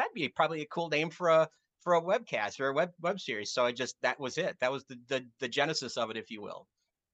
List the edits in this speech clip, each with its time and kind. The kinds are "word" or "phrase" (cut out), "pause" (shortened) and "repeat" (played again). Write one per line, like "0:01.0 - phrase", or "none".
none